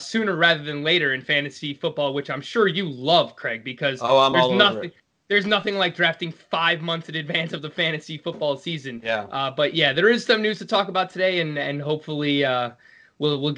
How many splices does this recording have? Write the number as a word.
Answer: zero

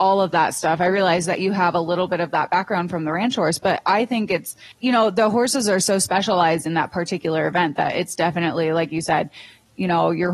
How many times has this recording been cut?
one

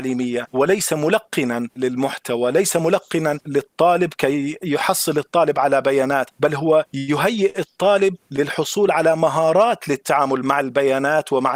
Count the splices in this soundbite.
zero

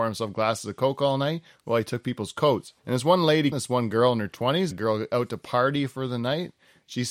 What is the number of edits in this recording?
three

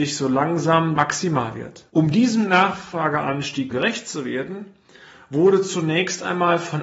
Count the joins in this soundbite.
three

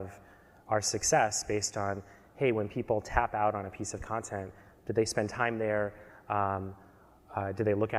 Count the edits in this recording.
zero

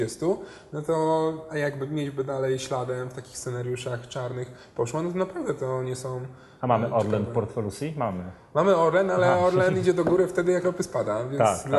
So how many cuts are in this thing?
one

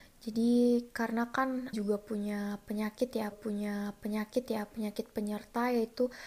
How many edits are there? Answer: two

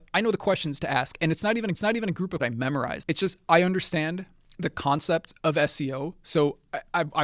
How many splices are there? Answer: two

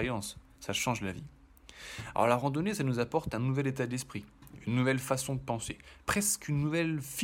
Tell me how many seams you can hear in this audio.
one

